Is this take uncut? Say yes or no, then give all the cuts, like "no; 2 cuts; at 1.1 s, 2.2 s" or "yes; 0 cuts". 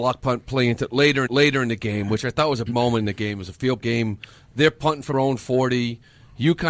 no; 4 cuts; at 1.3 s, 2.7 s, 3.8 s, 5.1 s